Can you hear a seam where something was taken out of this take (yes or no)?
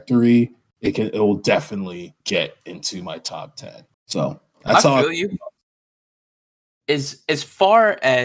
yes